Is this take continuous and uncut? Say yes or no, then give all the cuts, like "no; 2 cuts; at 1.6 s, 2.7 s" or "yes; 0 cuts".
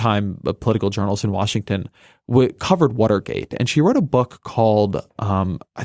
yes; 0 cuts